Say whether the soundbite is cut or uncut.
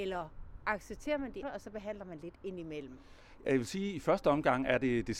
cut